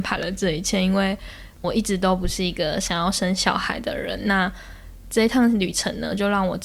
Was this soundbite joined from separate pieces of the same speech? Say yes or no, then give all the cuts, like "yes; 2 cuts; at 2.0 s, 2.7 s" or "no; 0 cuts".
yes; 1 cut; at 1.6 s